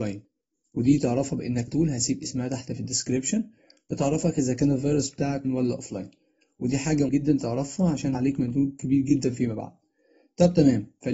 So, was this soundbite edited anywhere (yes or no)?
yes